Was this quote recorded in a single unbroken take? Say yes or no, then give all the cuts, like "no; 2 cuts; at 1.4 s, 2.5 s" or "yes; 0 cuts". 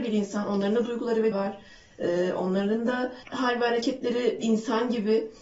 no; 3 cuts; at 1.3 s, 3.2 s, 4.4 s